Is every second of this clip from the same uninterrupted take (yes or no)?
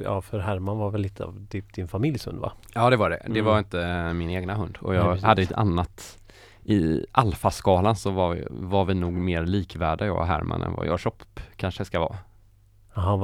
yes